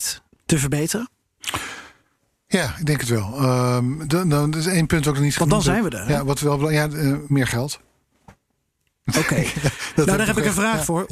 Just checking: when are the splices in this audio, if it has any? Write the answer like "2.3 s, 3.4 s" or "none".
none

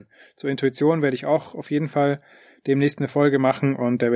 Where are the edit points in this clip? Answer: none

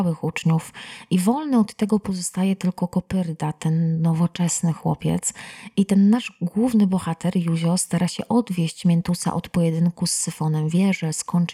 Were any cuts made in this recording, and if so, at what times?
none

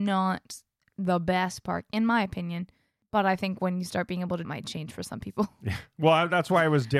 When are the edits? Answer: 4.4 s

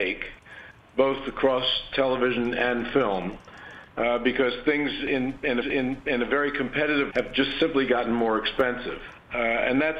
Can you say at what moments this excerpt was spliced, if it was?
3.9 s, 5.6 s, 7.1 s

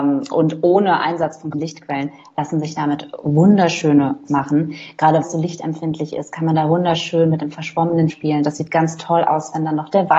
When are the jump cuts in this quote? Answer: 1.5 s, 4.3 s, 5.2 s, 8.1 s

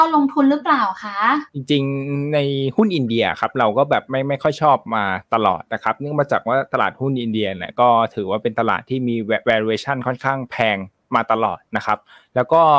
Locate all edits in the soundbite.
1.5 s, 11.7 s

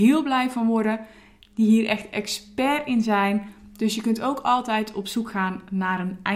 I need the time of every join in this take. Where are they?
none

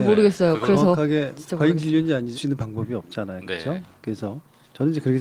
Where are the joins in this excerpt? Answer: 2.3 s

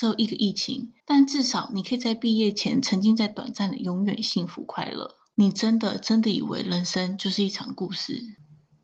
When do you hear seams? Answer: 1.0 s

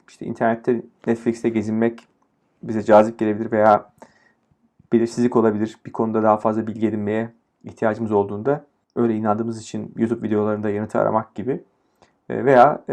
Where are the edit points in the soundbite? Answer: none

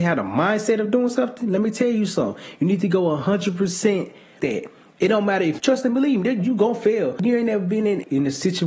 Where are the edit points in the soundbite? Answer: 4.4 s, 5.6 s

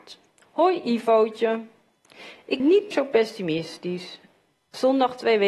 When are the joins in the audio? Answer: 2.6 s, 2.9 s

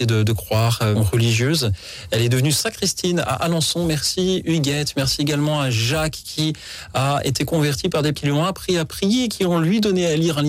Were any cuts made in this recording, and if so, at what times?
0.9 s, 8.1 s

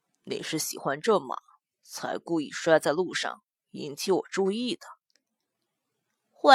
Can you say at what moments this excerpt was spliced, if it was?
none

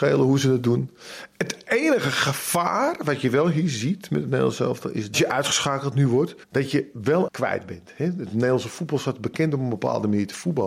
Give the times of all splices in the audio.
5.1 s, 6.4 s, 7.3 s

